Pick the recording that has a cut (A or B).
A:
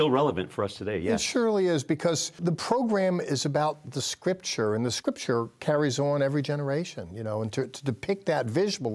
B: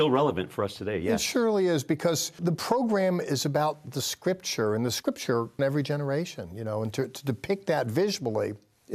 B